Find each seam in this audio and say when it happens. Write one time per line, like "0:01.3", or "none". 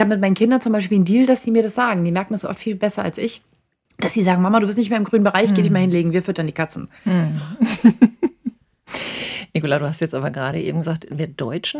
none